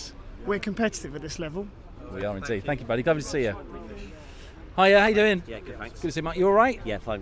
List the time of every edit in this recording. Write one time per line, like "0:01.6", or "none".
none